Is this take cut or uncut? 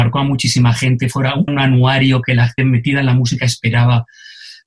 cut